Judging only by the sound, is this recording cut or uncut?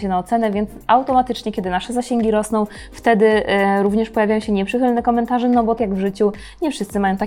cut